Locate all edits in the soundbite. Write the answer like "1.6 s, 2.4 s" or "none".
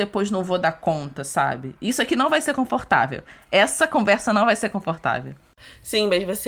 none